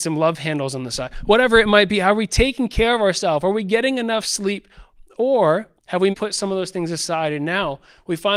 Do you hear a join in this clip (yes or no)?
yes